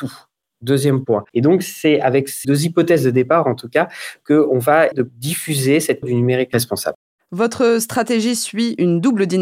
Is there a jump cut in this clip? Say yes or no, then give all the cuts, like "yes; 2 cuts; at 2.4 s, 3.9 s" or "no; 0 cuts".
yes; 5 cuts; at 1.3 s, 2.4 s, 4.9 s, 6.0 s, 7.1 s